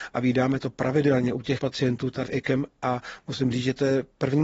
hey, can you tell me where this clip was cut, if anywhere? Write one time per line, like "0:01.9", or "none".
0:01.6
0:02.2